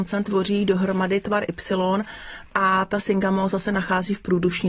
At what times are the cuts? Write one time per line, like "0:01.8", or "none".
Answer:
none